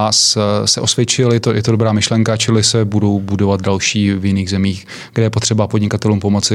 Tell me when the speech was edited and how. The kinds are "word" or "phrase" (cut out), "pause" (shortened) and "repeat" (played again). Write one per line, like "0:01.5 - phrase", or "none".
none